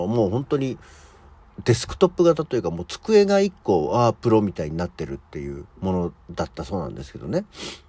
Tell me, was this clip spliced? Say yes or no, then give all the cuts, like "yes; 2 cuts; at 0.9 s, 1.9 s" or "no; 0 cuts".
yes; 1 cut; at 5.7 s